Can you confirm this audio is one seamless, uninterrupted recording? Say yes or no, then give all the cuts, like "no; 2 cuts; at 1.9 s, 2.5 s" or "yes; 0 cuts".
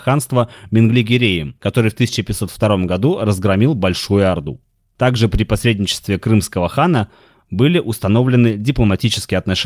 yes; 0 cuts